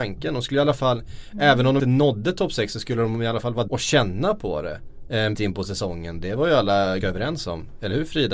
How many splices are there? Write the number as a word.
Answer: four